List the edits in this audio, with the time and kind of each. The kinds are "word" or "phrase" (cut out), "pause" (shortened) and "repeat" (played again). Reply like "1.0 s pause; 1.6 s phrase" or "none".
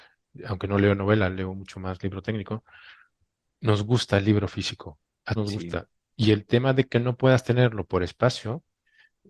5.4 s word

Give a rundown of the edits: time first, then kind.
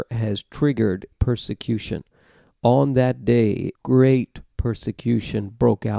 1.1 s word; 3.7 s word

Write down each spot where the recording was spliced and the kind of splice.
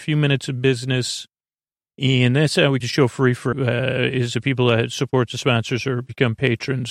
2.8 s word; 3.5 s word

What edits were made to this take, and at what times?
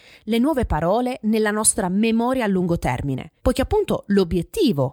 3.4 s pause

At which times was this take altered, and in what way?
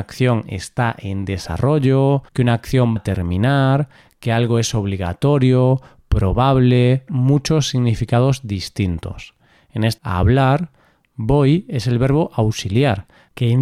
2.3 s pause; 3.0 s word; 7.1 s phrase; 10.0 s phrase

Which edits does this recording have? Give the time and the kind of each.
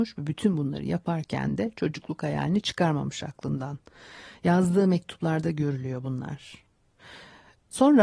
none

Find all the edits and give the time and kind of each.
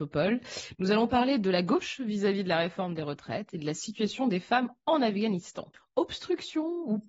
5.7 s pause

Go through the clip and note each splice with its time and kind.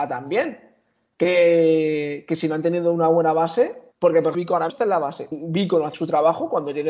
3.9 s pause; 4.3 s word; 4.7 s word; 5.3 s word; 5.9 s word

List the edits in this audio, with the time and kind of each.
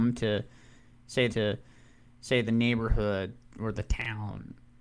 1.3 s repeat

